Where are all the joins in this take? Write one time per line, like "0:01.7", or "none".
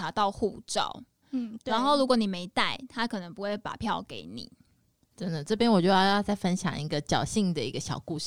none